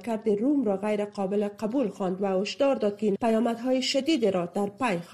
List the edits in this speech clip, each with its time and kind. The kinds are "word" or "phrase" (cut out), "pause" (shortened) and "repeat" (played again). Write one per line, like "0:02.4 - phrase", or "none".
0:03.2 - phrase